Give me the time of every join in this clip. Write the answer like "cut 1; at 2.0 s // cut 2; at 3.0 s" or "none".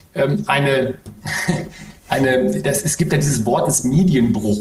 none